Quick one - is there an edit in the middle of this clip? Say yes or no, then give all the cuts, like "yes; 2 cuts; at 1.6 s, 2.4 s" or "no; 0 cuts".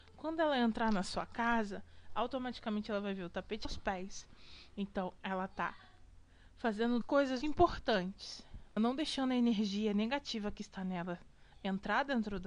yes; 4 cuts; at 3.6 s, 7.0 s, 7.4 s, 8.8 s